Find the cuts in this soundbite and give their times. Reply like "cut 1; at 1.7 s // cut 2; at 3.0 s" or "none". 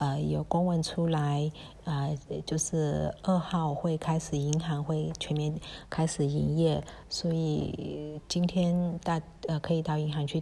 none